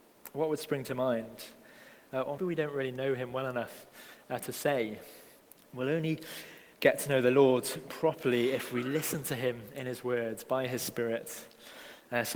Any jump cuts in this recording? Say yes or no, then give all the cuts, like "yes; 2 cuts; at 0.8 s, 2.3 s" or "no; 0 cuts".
yes; 3 cuts; at 2.4 s, 5.4 s, 6.7 s